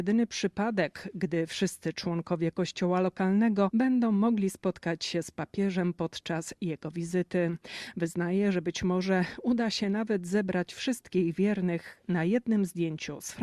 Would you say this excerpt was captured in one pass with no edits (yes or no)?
yes